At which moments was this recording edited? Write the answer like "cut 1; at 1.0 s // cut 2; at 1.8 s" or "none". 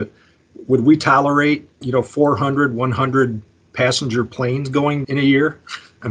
cut 1; at 1.8 s // cut 2; at 5.0 s